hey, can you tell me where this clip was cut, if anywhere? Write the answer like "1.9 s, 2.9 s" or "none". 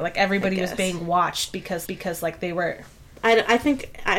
1.8 s